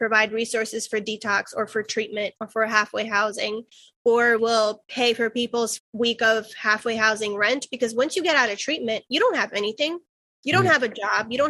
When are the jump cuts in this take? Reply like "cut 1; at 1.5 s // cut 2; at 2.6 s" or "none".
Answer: cut 1; at 4.4 s // cut 2; at 5.8 s